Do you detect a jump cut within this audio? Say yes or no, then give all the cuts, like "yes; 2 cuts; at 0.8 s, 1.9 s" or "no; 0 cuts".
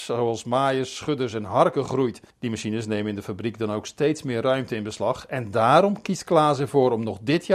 yes; 1 cut; at 2.3 s